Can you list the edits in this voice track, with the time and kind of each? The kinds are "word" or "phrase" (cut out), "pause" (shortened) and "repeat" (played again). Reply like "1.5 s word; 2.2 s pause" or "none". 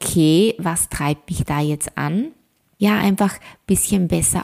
none